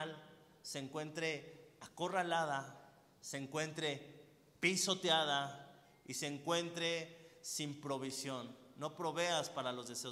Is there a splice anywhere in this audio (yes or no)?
no